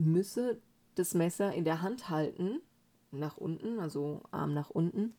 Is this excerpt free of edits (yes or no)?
yes